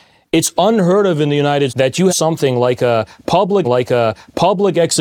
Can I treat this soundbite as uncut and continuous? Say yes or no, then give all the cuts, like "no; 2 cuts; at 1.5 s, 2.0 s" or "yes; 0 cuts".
no; 3 cuts; at 1.7 s, 2.1 s, 3.6 s